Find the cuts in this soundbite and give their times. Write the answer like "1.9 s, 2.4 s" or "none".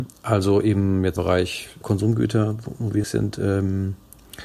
1.2 s, 1.8 s, 3.0 s